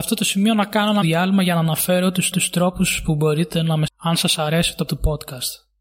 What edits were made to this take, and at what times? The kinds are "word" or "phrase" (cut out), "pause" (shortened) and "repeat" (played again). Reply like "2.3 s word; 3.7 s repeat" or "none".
1.0 s word; 2.3 s repeat; 3.9 s word; 4.9 s word